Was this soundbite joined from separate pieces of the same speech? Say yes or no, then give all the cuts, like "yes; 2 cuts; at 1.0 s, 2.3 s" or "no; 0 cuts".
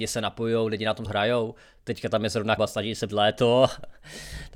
yes; 3 cuts; at 1.1 s, 2.6 s, 3.1 s